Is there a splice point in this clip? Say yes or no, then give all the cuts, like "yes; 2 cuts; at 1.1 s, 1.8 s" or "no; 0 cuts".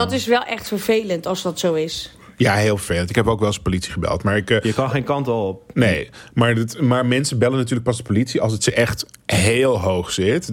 no; 0 cuts